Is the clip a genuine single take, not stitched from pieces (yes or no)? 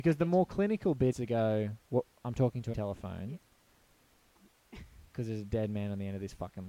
no